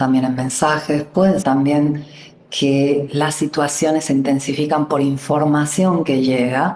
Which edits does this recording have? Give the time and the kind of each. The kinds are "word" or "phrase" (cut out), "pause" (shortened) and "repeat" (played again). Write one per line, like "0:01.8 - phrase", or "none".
0:01.4 - word